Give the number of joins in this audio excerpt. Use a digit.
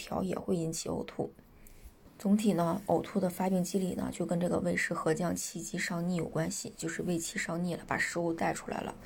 1